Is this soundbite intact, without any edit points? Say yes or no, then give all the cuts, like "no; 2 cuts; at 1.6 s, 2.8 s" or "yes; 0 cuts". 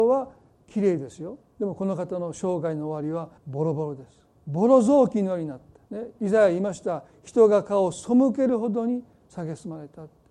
no; 4 cuts; at 1.5 s, 3.4 s, 4.3 s, 5.9 s